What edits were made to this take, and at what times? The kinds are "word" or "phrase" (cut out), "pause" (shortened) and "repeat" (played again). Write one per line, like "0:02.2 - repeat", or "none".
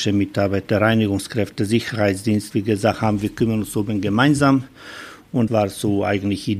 0:02.5 - word
0:05.5 - word